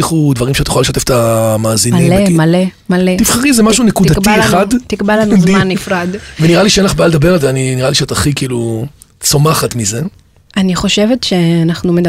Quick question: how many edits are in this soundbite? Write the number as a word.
zero